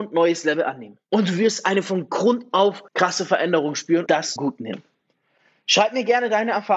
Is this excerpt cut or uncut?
cut